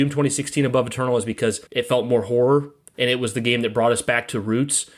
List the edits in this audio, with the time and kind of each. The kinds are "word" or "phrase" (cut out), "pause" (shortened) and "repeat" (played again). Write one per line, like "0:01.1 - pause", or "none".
0:01.7 - pause